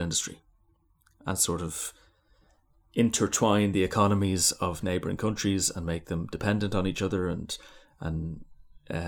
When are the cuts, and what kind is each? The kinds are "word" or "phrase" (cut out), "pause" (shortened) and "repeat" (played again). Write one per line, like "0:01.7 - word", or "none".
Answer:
none